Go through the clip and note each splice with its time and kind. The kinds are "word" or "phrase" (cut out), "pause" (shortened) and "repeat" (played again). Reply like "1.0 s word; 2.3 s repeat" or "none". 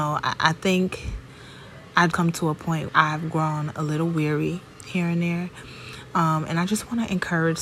2.1 s word; 2.9 s word